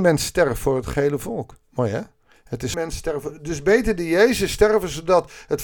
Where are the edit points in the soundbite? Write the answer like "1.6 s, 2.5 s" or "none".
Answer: 1.6 s, 2.7 s